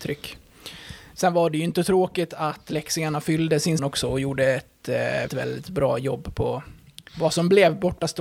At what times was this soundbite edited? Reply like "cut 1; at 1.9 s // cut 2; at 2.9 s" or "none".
cut 1; at 3.8 s // cut 2; at 5.3 s // cut 3; at 7.1 s

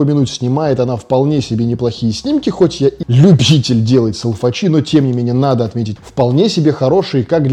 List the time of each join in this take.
cut 1; at 3.0 s // cut 2; at 6.0 s

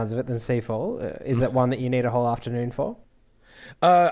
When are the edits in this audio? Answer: none

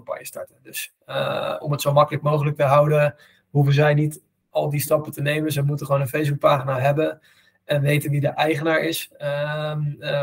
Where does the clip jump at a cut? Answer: none

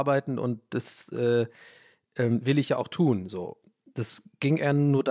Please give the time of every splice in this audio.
none

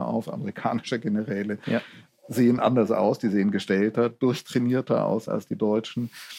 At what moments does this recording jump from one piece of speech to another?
none

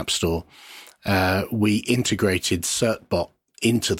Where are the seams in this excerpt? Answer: none

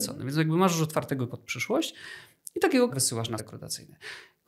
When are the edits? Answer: cut 1; at 1.3 s // cut 2; at 2.9 s // cut 3; at 3.4 s

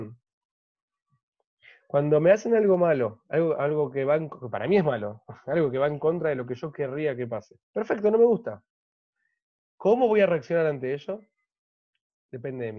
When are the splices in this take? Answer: cut 1; at 7.6 s

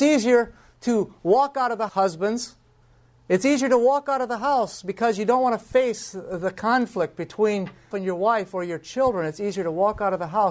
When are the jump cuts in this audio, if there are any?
cut 1; at 1.9 s // cut 2; at 2.8 s // cut 3; at 7.9 s

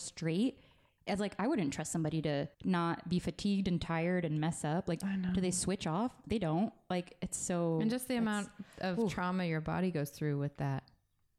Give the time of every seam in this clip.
cut 1; at 2.5 s

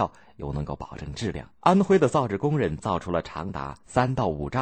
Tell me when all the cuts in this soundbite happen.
cut 1; at 1.5 s

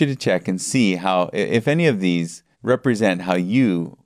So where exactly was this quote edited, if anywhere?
cut 1; at 2.5 s

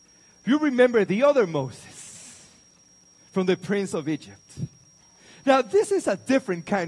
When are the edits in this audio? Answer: none

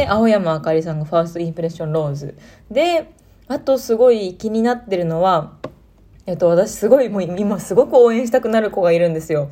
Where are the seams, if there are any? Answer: none

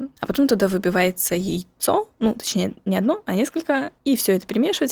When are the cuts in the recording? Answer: none

